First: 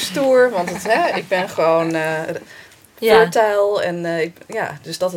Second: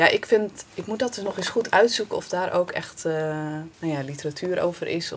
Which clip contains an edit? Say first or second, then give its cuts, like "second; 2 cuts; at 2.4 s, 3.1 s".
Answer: second; 1 cut; at 3.7 s